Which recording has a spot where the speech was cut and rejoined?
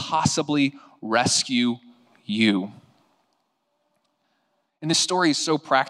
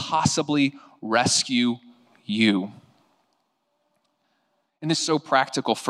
second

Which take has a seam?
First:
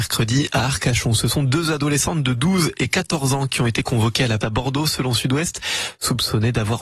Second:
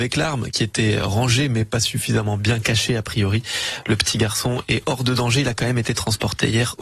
first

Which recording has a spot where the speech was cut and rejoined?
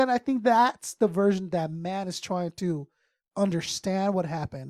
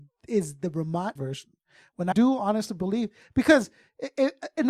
second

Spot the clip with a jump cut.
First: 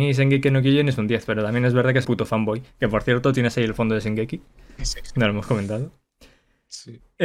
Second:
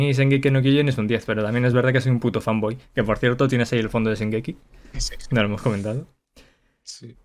first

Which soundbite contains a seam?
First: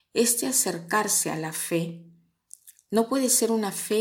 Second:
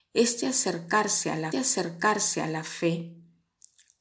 second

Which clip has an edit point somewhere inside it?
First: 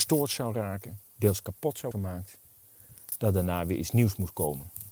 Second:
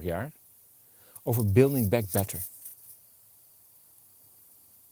first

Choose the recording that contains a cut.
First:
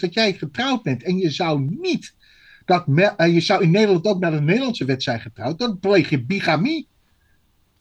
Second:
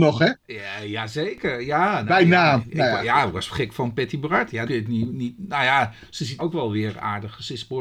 second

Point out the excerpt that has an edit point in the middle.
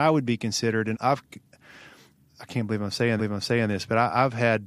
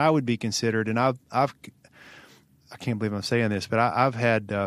first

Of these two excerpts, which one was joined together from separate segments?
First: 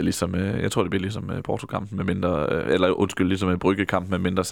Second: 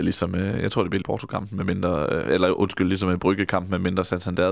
second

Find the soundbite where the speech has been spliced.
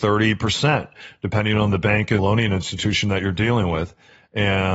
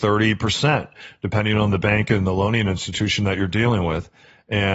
first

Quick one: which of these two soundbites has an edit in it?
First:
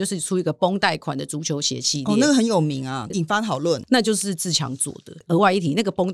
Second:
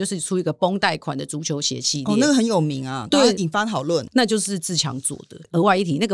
first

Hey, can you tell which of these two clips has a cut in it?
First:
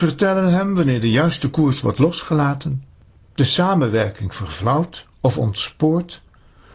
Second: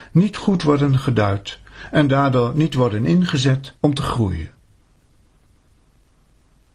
second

